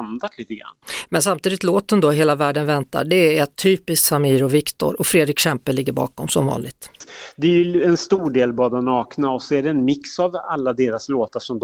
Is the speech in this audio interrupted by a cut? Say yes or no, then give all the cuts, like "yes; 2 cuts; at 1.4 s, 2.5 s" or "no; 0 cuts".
no; 0 cuts